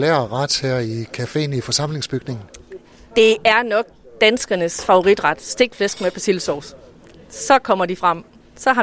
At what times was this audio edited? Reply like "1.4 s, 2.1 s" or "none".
none